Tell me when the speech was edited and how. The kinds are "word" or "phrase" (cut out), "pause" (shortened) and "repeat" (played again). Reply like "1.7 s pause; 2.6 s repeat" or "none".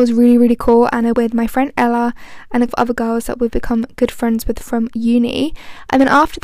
1.1 s word; 2.7 s word